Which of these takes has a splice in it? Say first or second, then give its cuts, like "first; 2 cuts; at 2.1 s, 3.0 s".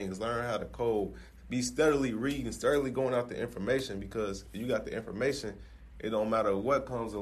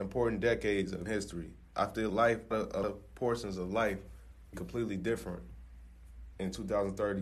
second; 5 cuts; at 1.1 s, 2.1 s, 2.5 s, 2.8 s, 4.5 s